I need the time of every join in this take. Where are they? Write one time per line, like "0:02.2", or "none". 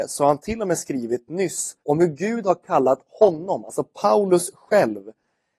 0:01.8